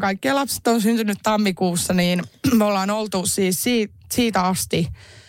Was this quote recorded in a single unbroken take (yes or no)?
yes